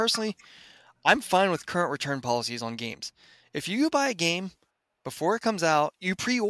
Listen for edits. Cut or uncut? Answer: uncut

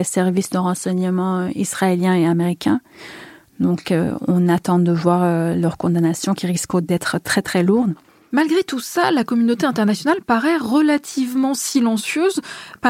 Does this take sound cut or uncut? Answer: uncut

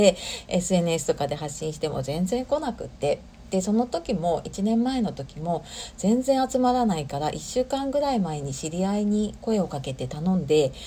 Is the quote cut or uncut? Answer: uncut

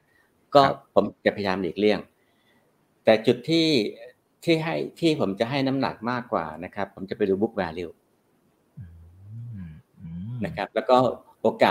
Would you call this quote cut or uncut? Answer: uncut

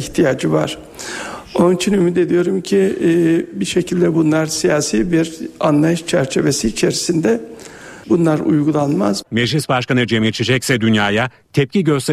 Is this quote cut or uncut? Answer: cut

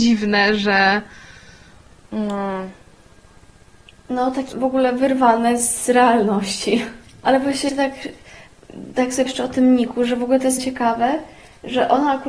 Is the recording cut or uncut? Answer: cut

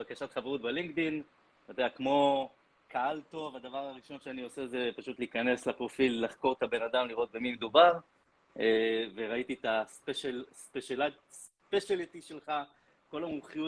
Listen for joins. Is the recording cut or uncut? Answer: uncut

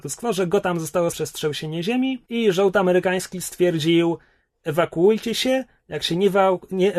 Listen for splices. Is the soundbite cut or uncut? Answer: cut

